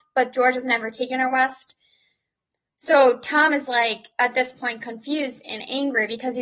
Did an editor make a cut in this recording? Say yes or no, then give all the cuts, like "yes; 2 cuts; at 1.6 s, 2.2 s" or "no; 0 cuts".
no; 0 cuts